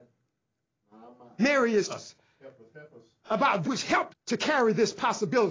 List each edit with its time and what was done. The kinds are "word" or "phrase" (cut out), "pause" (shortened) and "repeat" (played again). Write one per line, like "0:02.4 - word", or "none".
0:01.9 - word
0:03.6 - word
0:04.1 - word